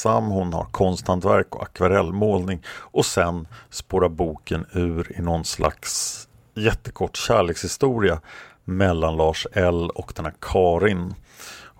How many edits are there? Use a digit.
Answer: 0